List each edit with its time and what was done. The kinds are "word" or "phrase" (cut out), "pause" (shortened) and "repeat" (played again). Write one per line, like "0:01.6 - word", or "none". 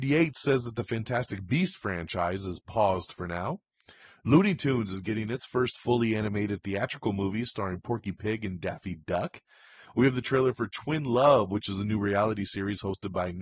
none